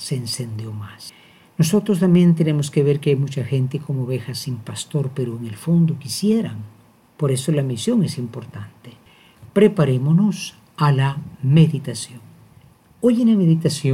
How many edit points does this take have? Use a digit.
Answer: 0